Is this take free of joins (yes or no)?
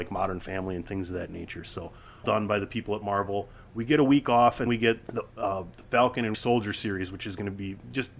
no